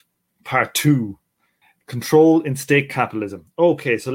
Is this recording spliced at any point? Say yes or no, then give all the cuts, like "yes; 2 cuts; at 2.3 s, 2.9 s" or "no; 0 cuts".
no; 0 cuts